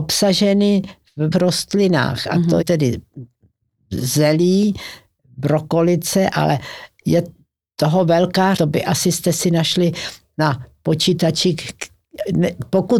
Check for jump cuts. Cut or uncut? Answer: cut